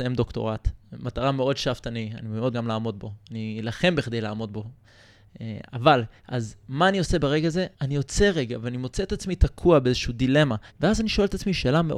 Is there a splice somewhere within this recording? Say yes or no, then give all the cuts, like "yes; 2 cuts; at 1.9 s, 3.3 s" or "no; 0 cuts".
yes; 4 cuts; at 2.5 s, 6.2 s, 7.7 s, 10.7 s